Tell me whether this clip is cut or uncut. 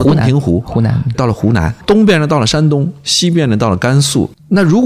cut